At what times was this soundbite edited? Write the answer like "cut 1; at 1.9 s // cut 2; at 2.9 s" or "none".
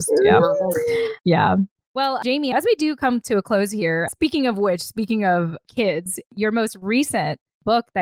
none